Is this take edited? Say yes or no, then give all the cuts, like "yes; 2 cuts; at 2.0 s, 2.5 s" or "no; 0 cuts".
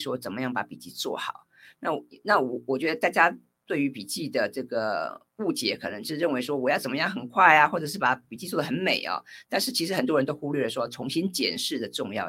no; 0 cuts